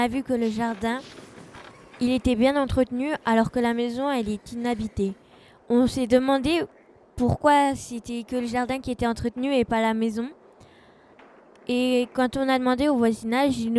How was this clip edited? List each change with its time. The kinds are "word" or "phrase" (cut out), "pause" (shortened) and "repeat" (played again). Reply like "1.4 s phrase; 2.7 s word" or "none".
none